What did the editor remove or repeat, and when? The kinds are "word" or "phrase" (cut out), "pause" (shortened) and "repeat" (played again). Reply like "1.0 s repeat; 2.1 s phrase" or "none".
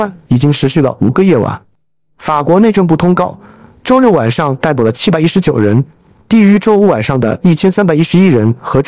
none